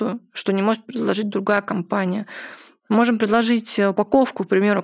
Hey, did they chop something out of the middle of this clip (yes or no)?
no